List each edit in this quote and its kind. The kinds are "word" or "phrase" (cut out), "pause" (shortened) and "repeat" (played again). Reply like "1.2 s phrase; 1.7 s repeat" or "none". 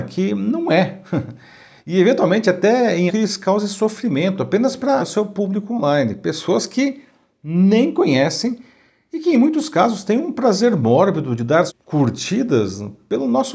3.1 s word; 5.0 s word; 11.7 s word